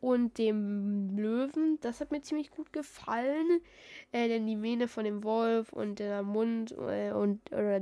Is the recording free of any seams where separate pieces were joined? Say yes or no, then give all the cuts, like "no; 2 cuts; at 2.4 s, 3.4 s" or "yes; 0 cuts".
yes; 0 cuts